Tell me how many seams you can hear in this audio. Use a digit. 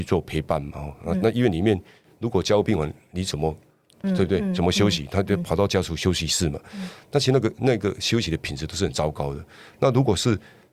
1